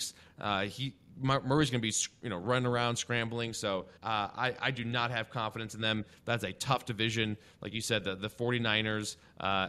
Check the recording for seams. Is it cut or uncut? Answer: cut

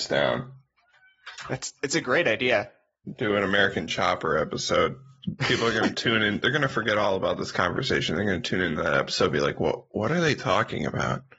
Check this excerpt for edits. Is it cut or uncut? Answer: uncut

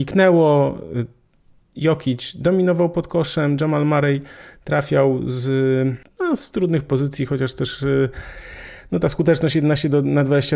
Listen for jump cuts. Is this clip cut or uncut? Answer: uncut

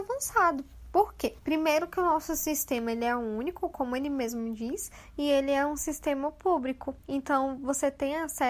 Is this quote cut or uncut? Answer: cut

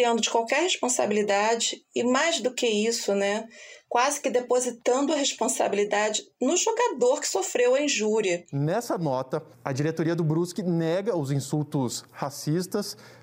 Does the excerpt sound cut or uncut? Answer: cut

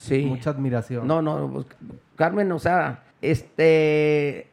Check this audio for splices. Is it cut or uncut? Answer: cut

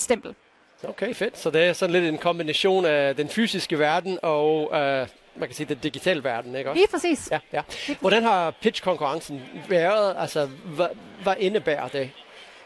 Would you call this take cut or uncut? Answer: uncut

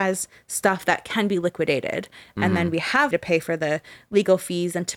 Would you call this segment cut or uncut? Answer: cut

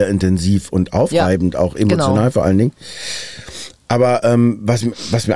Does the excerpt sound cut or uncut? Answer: uncut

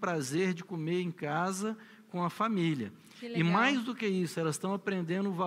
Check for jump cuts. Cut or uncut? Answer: uncut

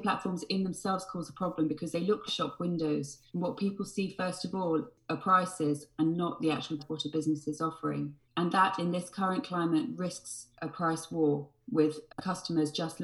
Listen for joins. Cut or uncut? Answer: cut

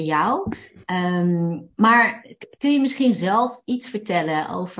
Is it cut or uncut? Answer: uncut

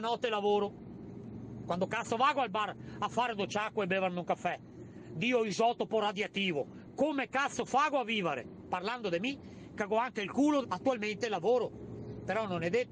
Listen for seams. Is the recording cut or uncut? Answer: cut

